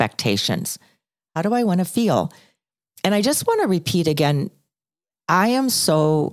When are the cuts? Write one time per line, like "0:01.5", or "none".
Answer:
none